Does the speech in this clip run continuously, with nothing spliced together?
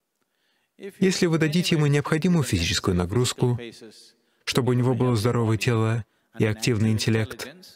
yes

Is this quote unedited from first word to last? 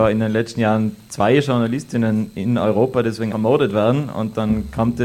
no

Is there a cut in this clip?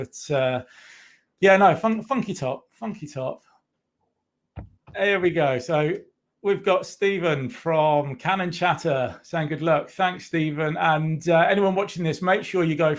no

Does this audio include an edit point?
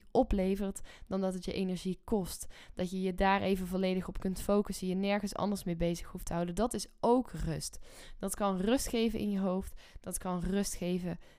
no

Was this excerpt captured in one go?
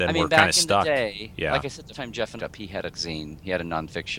no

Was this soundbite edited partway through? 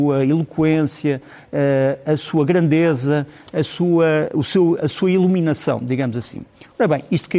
no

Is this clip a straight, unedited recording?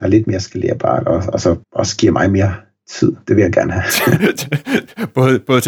no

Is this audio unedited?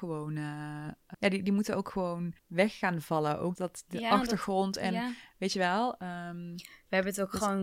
no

